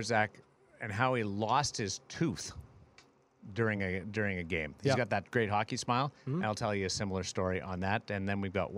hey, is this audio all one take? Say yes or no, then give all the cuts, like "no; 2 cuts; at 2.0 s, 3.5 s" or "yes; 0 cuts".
yes; 0 cuts